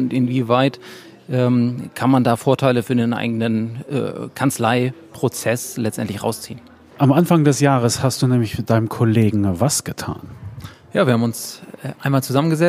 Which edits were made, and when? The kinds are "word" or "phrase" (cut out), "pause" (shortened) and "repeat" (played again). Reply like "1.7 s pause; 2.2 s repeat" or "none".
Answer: none